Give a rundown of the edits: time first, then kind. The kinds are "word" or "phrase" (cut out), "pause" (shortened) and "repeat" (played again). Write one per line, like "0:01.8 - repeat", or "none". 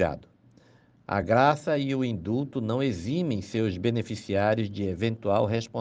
none

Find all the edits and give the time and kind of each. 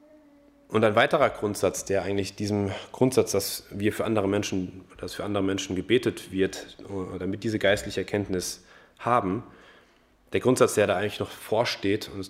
none

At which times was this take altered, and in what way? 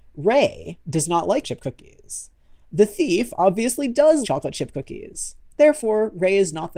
0:01.4 - word
0:04.2 - word

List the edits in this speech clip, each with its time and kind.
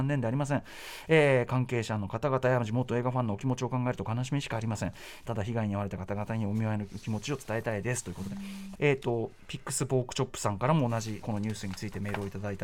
0:05.3 - phrase
0:08.8 - phrase
0:11.2 - word

